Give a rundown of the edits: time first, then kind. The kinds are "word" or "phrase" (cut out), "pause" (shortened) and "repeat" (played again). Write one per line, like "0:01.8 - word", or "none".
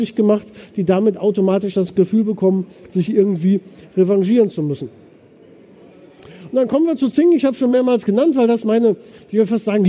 none